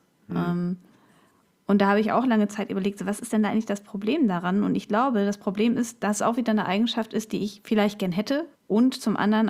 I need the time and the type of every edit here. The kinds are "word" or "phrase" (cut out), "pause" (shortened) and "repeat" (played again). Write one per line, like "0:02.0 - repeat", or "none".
0:08.5 - pause